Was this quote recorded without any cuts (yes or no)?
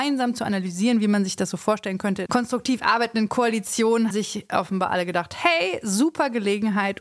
no